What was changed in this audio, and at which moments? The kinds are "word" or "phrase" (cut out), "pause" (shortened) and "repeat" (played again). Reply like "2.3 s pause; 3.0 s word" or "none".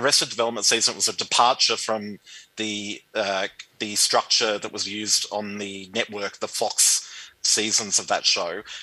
7.4 s word